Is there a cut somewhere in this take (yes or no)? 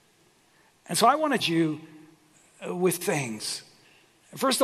yes